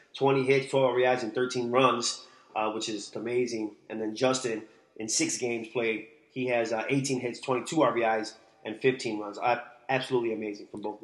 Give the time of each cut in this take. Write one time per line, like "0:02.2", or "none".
0:03.1